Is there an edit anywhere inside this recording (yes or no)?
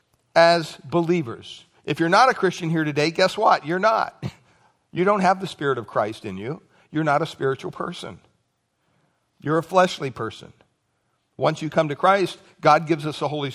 no